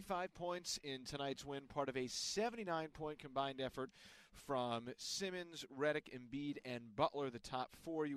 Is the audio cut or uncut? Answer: uncut